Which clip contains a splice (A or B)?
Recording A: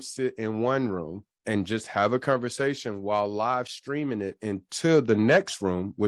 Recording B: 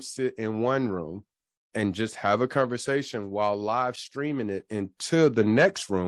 A